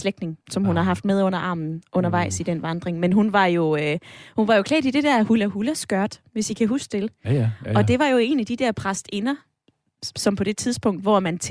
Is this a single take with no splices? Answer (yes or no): yes